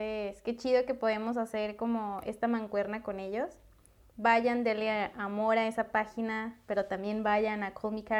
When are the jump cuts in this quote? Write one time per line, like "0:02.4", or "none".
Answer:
none